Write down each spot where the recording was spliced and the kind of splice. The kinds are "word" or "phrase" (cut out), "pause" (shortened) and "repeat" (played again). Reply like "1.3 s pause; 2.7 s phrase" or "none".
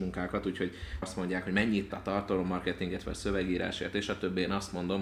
1.0 s phrase; 1.9 s word